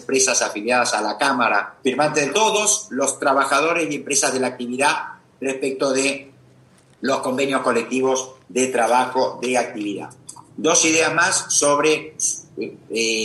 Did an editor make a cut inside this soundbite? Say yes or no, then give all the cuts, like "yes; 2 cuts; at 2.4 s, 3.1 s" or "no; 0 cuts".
yes; 3 cuts; at 1.8 s, 2.3 s, 8.4 s